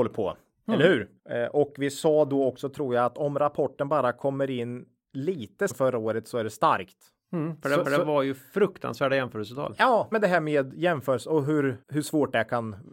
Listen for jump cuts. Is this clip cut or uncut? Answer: cut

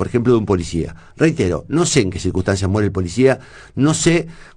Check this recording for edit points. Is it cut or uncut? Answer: uncut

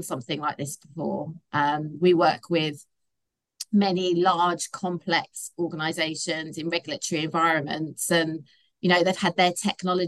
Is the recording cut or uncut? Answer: uncut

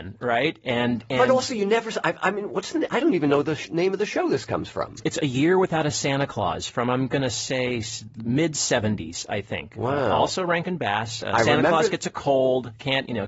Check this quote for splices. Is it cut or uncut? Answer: uncut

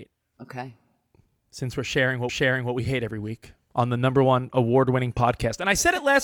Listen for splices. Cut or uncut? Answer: cut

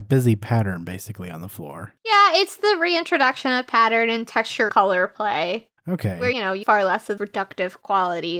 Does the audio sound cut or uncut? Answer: cut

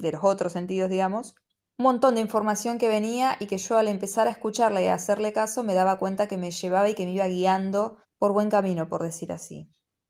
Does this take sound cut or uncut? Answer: cut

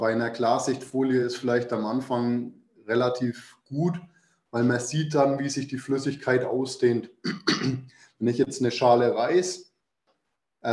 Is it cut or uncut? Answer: uncut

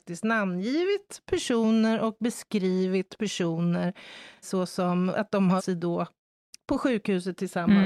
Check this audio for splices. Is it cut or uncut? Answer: cut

